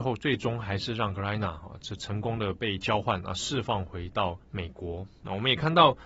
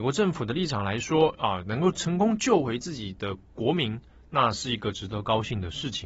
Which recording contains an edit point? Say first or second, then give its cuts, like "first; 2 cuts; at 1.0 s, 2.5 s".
first; 1 cut; at 4.4 s